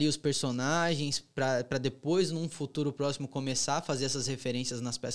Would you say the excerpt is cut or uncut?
uncut